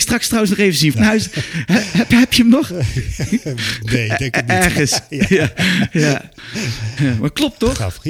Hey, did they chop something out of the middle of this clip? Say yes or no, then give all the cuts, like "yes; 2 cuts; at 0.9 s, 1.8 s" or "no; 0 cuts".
yes; 1 cut; at 0.9 s